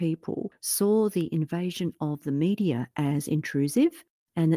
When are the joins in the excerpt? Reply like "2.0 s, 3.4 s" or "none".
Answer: none

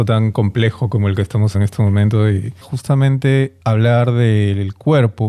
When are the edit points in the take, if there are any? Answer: 1.5 s, 2.6 s, 3.6 s

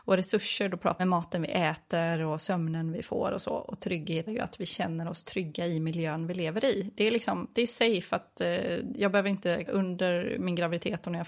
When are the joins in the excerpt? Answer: 1.0 s, 4.3 s, 9.7 s

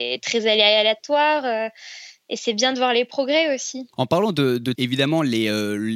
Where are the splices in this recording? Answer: 3.9 s, 4.7 s

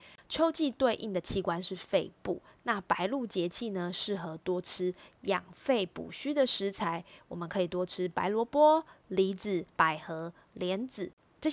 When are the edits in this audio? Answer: 9.7 s

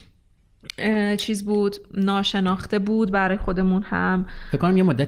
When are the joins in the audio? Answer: none

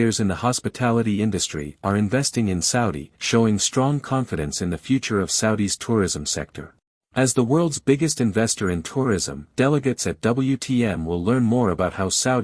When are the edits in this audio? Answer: 3.2 s, 6.8 s, 9.5 s

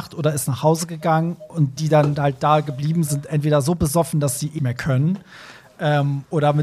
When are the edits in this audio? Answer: 1.8 s, 3.1 s, 4.6 s

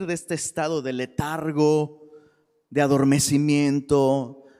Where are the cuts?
none

